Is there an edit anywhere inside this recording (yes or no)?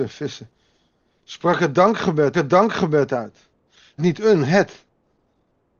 yes